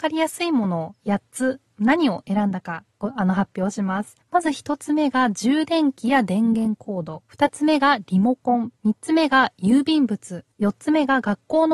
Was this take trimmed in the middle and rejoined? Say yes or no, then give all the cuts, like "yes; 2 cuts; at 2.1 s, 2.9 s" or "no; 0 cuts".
yes; 4 cuts; at 4.2 s, 7.3 s, 8.8 s, 10.5 s